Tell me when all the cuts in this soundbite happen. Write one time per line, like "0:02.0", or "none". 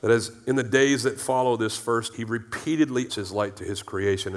0:02.1
0:03.1